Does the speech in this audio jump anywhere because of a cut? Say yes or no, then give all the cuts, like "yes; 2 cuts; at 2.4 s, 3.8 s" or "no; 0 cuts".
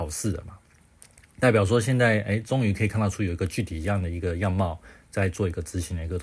no; 0 cuts